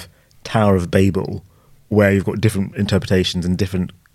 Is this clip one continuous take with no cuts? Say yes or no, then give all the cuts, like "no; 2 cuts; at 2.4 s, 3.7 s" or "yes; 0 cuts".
yes; 0 cuts